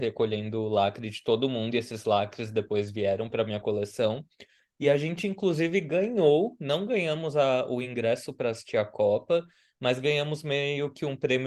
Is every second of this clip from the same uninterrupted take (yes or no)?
yes